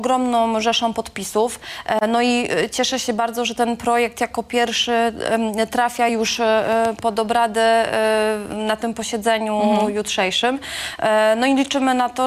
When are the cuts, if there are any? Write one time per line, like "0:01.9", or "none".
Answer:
none